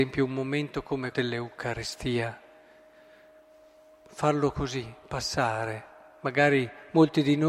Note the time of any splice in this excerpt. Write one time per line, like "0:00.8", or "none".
0:01.1